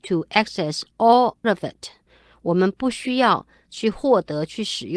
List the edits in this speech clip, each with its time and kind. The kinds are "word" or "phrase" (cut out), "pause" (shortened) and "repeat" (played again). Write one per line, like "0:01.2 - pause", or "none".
0:01.4 - word
0:03.7 - word